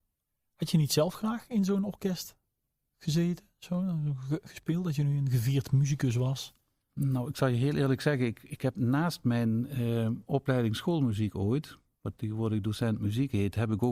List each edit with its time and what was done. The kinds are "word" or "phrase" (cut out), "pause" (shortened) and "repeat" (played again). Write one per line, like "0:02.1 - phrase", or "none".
none

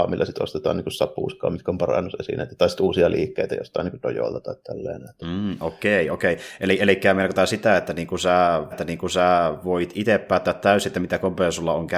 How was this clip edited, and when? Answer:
0:08.7 - repeat

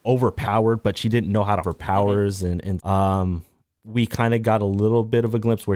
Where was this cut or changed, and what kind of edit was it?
0:01.6 - phrase
0:02.8 - word

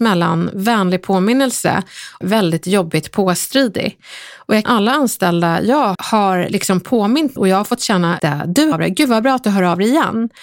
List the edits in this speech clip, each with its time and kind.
0:02.2 - word
0:04.6 - phrase
0:05.9 - word
0:07.4 - word
0:08.2 - word
0:08.7 - word

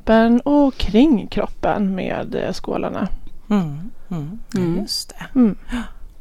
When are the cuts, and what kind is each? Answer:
none

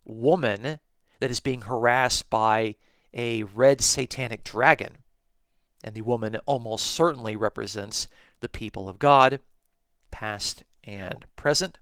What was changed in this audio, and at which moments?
none

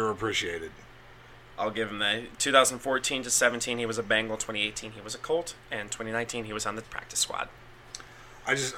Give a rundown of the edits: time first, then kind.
0:06.8 - word

